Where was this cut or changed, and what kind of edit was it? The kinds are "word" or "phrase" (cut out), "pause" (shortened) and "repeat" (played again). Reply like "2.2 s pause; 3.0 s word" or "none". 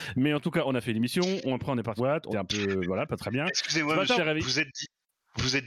2.0 s word; 2.3 s word; 4.2 s word